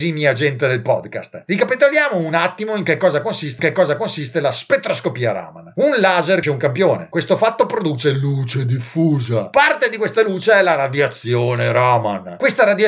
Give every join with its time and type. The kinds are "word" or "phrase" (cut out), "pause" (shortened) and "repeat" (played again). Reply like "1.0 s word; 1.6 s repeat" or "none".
3.6 s repeat; 6.4 s word